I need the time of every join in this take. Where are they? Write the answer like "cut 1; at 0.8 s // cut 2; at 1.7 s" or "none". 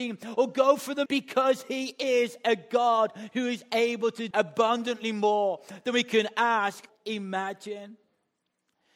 cut 1; at 1.1 s // cut 2; at 4.3 s // cut 3; at 6.9 s